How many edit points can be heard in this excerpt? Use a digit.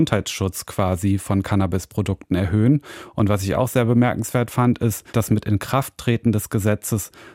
1